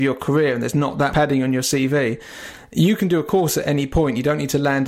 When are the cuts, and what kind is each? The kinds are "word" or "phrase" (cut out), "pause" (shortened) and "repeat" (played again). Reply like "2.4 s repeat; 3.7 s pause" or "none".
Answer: 1.1 s word